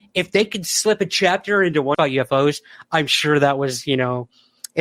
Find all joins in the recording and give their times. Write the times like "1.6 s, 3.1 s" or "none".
1.9 s